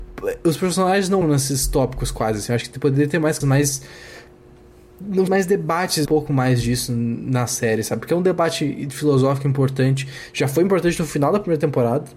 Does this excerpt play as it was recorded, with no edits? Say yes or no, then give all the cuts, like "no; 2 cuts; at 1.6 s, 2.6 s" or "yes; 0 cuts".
no; 4 cuts; at 1.2 s, 3.4 s, 5.3 s, 6.1 s